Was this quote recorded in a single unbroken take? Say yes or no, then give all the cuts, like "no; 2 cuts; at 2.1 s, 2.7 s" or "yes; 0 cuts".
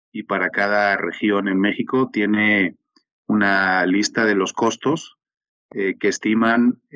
yes; 0 cuts